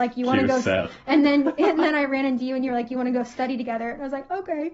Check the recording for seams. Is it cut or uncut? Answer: uncut